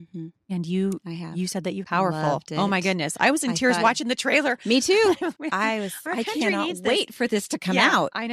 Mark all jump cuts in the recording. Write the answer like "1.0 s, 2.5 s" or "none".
1.8 s, 5.3 s